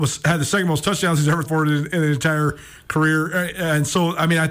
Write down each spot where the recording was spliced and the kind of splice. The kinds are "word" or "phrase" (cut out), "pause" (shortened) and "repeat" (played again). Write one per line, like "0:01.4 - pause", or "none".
0:01.4 - word